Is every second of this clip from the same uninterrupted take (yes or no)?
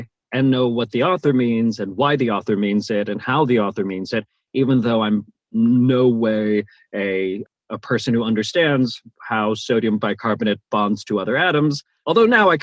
yes